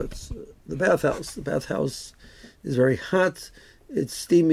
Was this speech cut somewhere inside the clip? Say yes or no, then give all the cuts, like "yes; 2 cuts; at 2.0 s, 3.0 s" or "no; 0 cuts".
no; 0 cuts